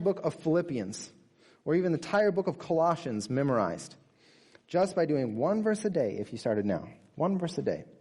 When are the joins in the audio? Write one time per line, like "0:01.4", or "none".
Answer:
none